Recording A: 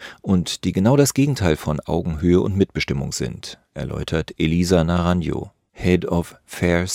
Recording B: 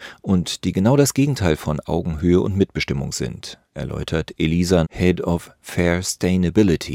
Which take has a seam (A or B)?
B